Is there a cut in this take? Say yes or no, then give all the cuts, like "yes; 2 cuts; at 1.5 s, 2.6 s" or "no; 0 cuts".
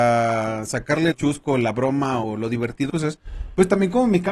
yes; 3 cuts; at 1.1 s, 2.2 s, 2.9 s